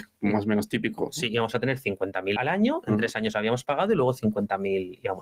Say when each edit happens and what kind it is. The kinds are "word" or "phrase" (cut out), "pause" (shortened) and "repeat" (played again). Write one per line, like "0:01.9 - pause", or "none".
0:02.4 - word